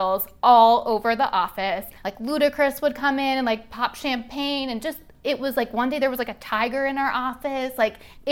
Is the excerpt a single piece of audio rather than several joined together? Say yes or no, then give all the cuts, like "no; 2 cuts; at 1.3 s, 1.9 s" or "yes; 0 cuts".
yes; 0 cuts